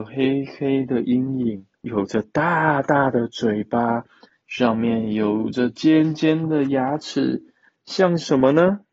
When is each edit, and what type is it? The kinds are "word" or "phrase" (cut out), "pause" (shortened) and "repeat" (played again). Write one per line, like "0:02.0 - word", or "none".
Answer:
0:01.7 - pause